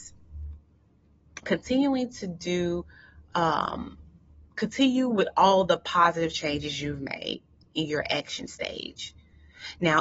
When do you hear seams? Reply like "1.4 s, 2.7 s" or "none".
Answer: 1.4 s